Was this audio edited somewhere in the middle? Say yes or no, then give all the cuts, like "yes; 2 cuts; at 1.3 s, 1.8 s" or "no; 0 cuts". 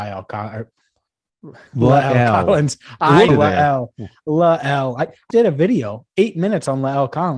yes; 3 cuts; at 1.7 s, 3.3 s, 5.3 s